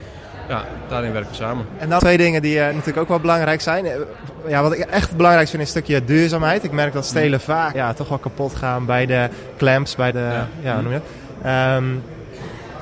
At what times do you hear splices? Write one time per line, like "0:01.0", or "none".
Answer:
0:02.0
0:07.7
0:10.1